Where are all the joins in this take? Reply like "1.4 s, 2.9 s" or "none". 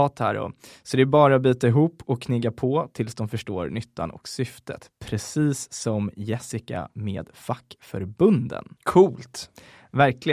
8.8 s